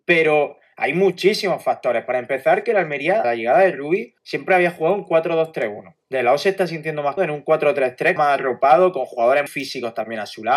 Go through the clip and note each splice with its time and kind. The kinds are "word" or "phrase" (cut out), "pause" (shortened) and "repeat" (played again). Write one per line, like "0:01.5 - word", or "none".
0:03.2 - word
0:04.2 - pause
0:06.0 - pause
0:07.2 - word
0:08.2 - word
0:09.5 - word